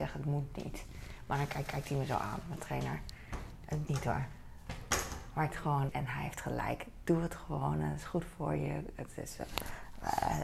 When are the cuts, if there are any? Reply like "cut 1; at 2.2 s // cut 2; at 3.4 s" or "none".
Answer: cut 1; at 1.7 s // cut 2; at 3.9 s // cut 3; at 5.5 s // cut 4; at 5.9 s